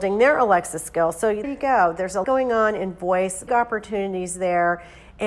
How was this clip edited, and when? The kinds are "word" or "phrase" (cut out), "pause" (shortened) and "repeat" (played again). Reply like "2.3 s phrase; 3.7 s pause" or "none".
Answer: 1.4 s word; 2.2 s word; 3.5 s word